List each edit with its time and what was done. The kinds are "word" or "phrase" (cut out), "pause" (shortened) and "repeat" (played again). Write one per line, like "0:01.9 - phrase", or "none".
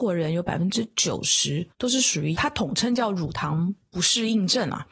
0:01.7 - pause